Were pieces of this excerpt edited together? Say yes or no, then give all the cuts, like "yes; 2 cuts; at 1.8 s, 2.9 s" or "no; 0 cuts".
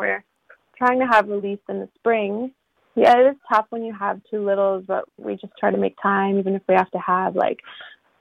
no; 0 cuts